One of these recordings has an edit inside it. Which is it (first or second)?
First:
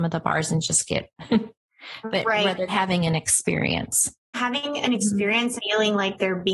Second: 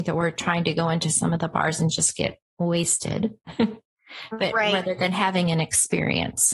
first